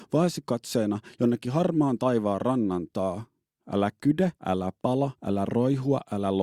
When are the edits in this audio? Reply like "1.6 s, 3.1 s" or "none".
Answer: 4.4 s, 5.2 s

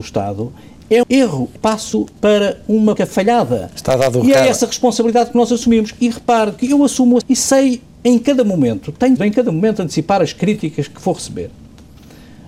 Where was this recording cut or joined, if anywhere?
1.0 s, 1.6 s, 3.0 s, 7.2 s, 9.2 s

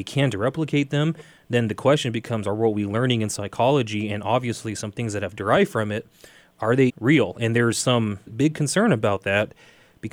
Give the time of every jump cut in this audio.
6.9 s, 8.3 s

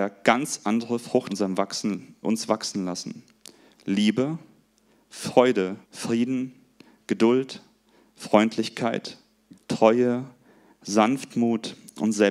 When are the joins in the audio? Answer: 1.3 s, 2.2 s, 5.8 s, 9.5 s

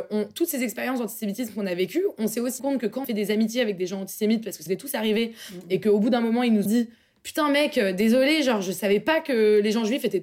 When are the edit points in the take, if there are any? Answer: 2.6 s, 3.0 s, 4.7 s, 6.7 s

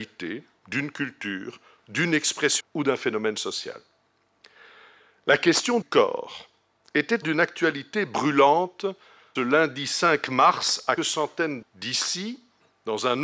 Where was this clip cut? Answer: 2.6 s, 5.8 s, 7.2 s, 9.4 s, 11.0 s, 11.6 s

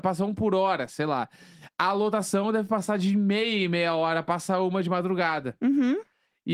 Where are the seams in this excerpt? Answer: none

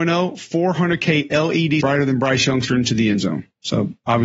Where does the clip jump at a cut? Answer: 1.8 s, 2.7 s

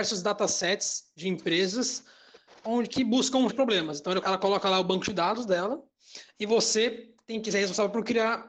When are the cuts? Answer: 2.9 s, 3.5 s, 4.2 s

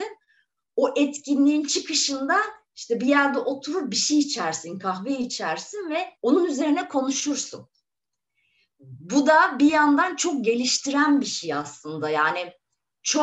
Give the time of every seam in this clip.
6.2 s

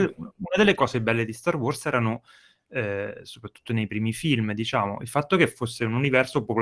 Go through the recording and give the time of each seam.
none

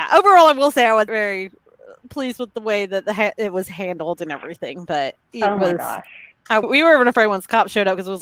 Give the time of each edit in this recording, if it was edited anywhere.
1.1 s, 5.2 s, 6.6 s

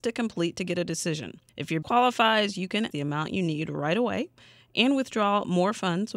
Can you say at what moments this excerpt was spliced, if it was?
1.5 s, 1.8 s, 2.9 s

